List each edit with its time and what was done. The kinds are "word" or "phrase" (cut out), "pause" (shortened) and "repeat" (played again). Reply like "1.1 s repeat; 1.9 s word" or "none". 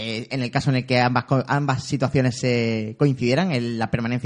none